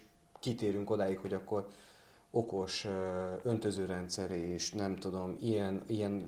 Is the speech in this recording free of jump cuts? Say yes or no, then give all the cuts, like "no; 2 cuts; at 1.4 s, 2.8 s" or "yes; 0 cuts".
yes; 0 cuts